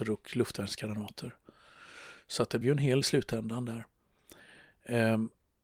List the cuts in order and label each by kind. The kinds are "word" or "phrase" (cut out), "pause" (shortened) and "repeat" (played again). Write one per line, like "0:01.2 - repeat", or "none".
0:02.6 - word
0:03.0 - word

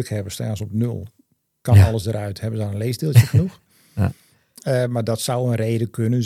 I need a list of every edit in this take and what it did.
none

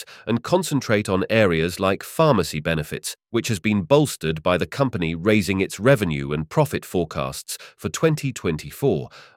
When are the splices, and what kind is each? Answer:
0:03.2 - pause

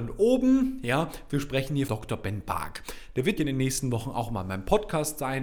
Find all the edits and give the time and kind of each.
0:01.9 - word
0:03.4 - word

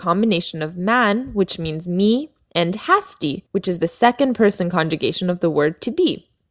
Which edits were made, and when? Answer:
0:03.5 - pause

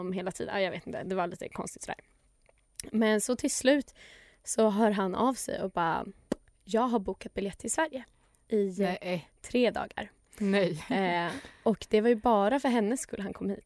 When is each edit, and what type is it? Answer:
none

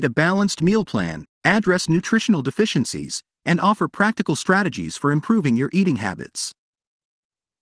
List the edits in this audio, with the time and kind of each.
none

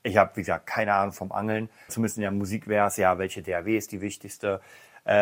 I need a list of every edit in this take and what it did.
0:01.9 - word

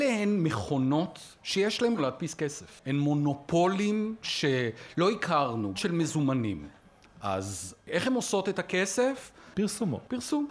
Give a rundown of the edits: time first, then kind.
0:02.0 - word
0:04.2 - word
0:05.7 - phrase

